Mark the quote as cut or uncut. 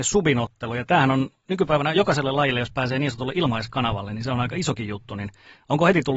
uncut